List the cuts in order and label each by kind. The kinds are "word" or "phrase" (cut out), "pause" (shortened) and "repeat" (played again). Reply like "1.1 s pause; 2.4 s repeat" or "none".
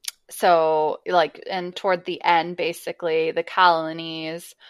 1.7 s word